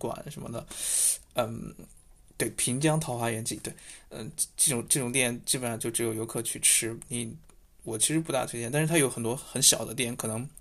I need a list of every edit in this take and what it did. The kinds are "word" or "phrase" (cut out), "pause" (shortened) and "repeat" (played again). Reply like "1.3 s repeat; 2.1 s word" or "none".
none